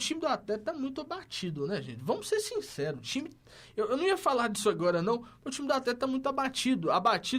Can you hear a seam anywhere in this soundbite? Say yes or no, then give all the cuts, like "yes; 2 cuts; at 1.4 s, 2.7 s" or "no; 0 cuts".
no; 0 cuts